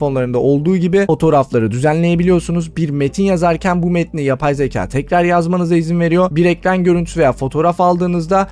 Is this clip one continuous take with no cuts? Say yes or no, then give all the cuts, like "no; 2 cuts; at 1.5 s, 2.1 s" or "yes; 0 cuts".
yes; 0 cuts